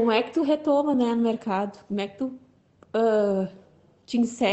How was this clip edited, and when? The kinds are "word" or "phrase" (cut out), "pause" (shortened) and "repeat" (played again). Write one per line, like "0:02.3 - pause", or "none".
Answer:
none

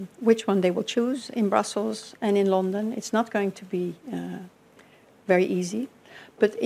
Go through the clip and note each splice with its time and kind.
none

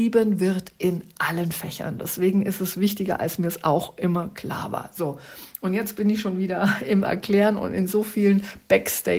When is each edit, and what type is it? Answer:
none

